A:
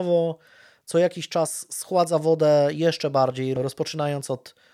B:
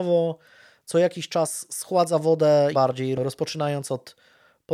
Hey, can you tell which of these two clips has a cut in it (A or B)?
B